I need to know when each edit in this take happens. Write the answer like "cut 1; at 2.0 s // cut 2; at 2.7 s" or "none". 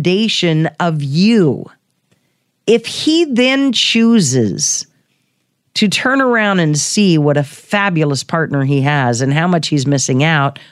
none

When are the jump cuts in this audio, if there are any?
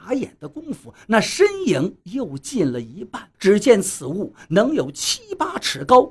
cut 1; at 3.3 s

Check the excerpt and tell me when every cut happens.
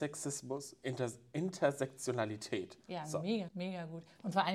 cut 1; at 3.5 s

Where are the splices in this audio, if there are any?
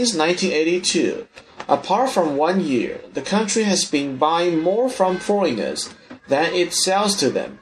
none

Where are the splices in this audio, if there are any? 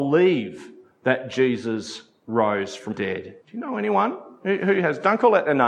cut 1; at 2.9 s // cut 2; at 3.4 s

